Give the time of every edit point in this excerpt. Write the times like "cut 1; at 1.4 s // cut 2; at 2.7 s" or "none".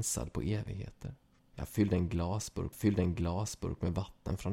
cut 1; at 1.4 s // cut 2; at 2.7 s